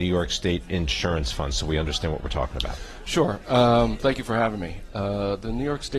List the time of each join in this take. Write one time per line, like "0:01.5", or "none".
none